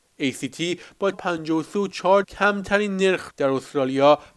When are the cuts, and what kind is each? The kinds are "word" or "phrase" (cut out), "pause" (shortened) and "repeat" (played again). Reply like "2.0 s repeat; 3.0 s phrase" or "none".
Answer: 1.1 s word; 2.2 s word; 3.3 s word